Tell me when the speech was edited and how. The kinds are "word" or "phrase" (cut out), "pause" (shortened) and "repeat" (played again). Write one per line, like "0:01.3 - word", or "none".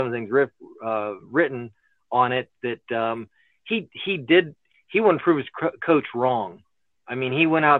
none